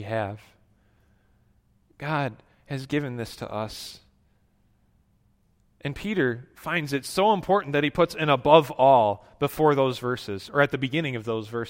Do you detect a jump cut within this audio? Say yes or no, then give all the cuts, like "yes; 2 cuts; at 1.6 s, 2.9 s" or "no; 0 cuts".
no; 0 cuts